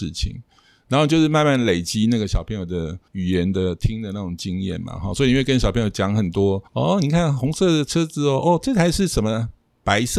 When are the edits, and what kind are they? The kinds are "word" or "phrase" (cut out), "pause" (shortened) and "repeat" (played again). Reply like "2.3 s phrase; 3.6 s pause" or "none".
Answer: 3.1 s pause; 6.7 s pause